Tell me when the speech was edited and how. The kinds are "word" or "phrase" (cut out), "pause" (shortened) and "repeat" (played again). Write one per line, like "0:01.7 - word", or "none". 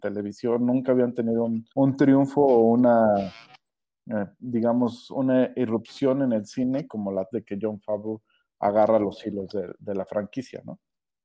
0:01.7 - pause
0:07.3 - phrase